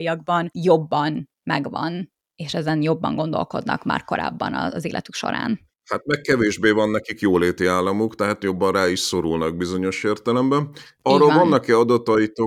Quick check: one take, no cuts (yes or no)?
yes